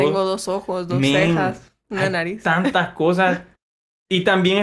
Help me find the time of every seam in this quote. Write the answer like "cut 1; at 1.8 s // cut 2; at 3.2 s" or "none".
none